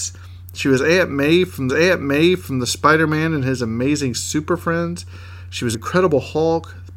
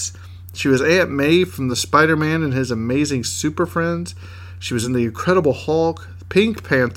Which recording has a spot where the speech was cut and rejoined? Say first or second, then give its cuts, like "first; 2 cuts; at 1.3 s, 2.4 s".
first; 2 cuts; at 1.7 s, 5.7 s